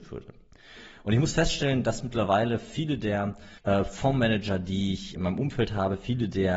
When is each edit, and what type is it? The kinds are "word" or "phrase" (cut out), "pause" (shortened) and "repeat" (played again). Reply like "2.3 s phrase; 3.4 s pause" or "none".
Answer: 3.6 s pause; 5.2 s word